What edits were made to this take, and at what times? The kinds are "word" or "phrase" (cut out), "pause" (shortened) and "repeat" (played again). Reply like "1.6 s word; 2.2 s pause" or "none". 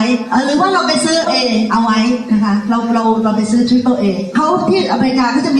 1.3 s word

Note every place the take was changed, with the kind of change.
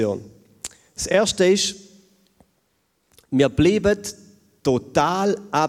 none

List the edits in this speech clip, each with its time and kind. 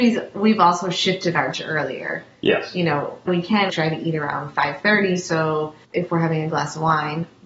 1.5 s phrase; 3.3 s word; 3.7 s word; 5.8 s pause

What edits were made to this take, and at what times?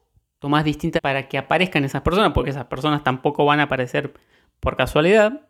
1.0 s word

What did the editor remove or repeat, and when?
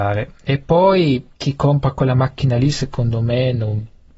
1.3 s pause

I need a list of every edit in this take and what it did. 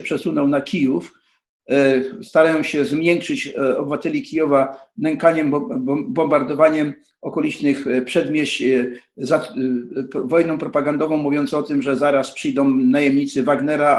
none

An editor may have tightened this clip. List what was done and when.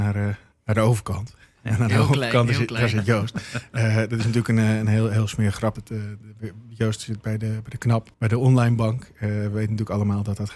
5.8 s phrase; 8.1 s pause

